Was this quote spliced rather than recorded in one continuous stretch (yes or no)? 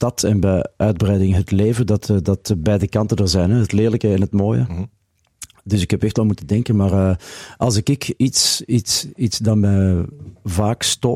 no